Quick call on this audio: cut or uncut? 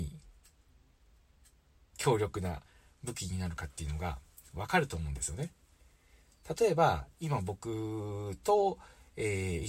uncut